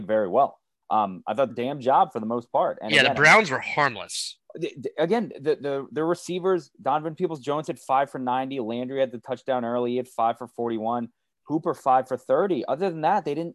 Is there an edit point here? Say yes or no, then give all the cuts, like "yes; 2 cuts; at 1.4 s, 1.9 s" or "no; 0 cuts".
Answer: yes; 1 cut; at 1.5 s